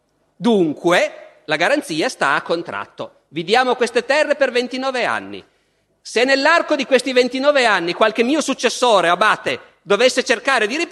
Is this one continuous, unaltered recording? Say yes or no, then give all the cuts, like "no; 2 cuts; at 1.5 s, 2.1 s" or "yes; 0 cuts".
yes; 0 cuts